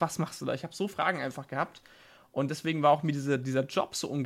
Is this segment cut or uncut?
cut